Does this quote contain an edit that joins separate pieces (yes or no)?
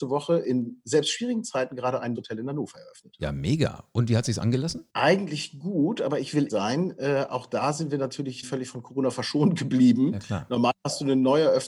yes